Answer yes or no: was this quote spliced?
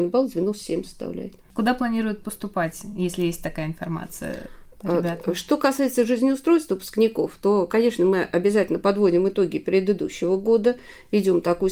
no